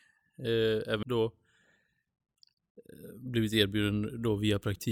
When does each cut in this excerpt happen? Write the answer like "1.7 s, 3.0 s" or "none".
1.0 s

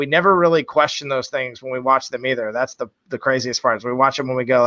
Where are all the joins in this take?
none

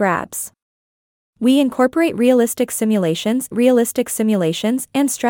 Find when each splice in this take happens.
3.5 s

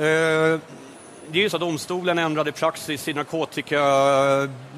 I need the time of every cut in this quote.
1.5 s

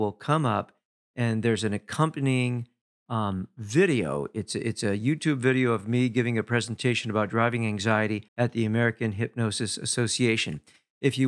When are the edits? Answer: 8.3 s

